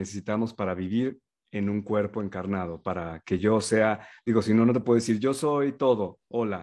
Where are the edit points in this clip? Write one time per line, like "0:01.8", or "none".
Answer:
none